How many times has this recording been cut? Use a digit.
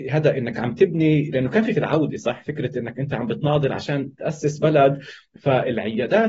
1